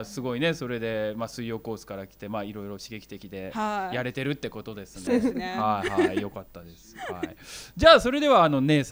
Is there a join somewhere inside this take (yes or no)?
yes